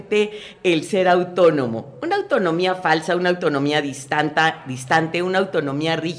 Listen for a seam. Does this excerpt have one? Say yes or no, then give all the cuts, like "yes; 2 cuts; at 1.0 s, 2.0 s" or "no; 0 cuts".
no; 0 cuts